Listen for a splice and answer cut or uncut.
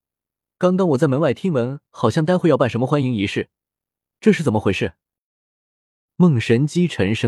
uncut